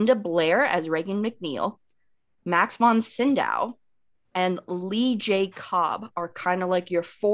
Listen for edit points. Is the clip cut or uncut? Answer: uncut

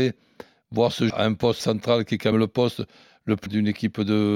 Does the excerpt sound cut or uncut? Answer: cut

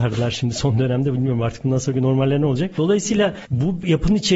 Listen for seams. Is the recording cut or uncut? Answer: uncut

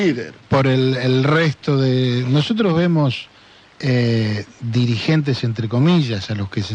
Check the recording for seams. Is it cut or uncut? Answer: uncut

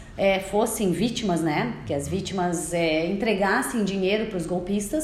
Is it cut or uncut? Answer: uncut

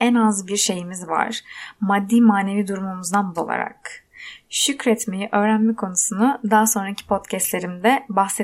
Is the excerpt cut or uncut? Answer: cut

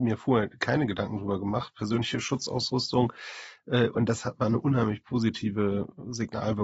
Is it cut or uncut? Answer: uncut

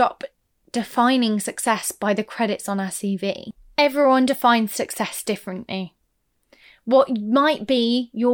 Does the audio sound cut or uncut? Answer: uncut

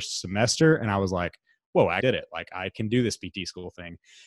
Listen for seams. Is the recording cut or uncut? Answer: cut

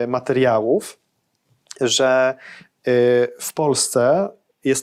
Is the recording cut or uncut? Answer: uncut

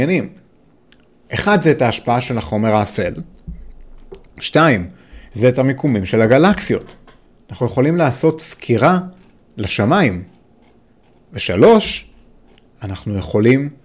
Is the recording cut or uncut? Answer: uncut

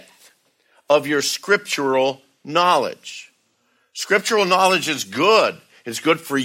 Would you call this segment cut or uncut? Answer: uncut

